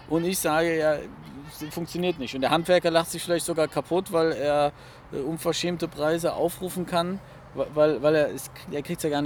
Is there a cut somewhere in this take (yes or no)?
no